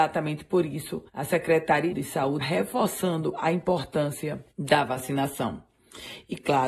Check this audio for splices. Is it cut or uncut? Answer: cut